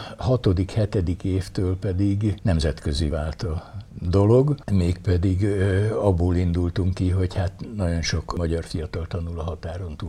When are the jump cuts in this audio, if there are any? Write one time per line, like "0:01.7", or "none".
0:03.1